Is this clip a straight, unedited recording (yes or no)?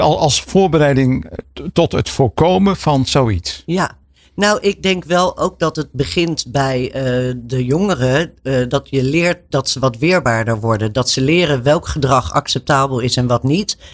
yes